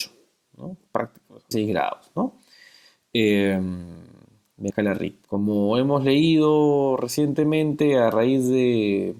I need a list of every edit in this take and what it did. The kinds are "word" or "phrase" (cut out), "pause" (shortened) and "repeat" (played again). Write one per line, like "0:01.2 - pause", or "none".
0:01.5 - word
0:04.7 - word
0:05.2 - pause